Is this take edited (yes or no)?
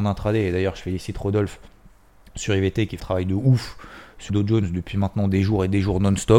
yes